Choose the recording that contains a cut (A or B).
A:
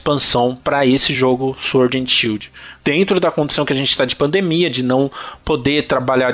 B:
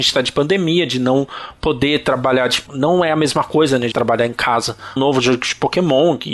B